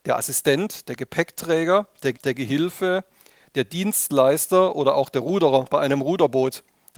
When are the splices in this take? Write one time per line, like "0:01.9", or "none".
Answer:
0:02.1